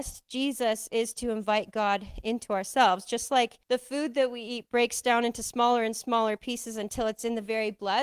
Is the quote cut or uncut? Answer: cut